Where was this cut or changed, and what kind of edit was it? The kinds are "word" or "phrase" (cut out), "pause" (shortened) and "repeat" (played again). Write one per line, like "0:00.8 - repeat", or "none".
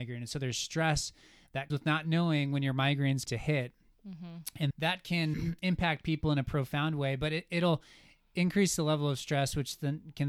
0:01.7 - word
0:03.3 - word
0:04.7 - word
0:05.3 - word